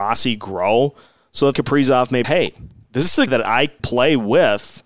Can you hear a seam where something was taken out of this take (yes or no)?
yes